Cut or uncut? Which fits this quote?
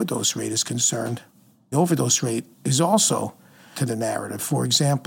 cut